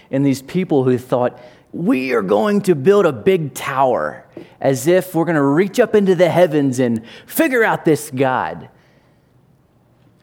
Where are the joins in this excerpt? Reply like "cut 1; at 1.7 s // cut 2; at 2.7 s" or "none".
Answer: none